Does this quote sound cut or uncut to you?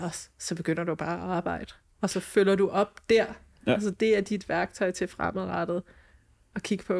uncut